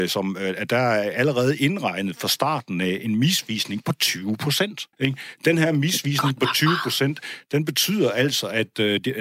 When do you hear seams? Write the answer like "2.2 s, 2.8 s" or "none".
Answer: 4.9 s